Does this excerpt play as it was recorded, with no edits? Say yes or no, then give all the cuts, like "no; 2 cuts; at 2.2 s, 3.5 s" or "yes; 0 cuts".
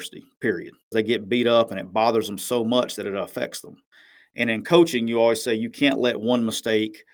no; 1 cut; at 0.9 s